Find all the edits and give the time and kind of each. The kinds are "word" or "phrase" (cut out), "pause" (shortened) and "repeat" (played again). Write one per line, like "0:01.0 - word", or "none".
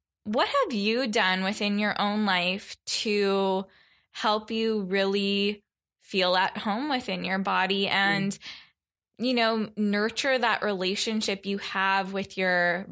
none